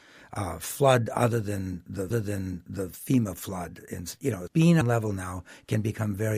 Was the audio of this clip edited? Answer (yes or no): yes